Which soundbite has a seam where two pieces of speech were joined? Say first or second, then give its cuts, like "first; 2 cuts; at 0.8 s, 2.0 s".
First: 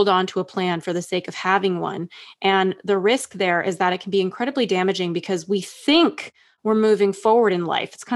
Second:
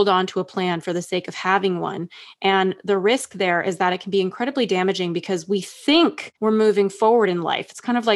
second; 1 cut; at 6.4 s